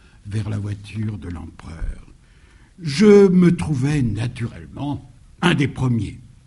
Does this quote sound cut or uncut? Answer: uncut